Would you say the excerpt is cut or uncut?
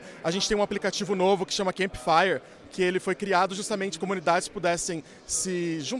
cut